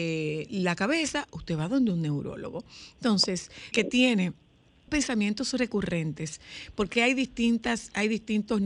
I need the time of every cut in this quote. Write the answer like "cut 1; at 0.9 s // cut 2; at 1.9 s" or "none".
cut 1; at 3.7 s // cut 2; at 4.9 s